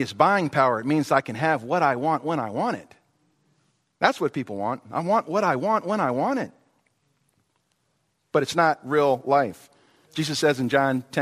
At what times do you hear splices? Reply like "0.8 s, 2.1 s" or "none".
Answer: none